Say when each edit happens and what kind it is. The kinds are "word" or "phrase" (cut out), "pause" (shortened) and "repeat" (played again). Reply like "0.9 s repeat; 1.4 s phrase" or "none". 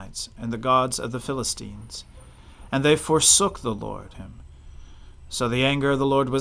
4.1 s phrase